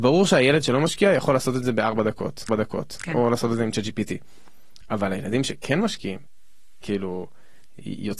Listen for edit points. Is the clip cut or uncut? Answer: cut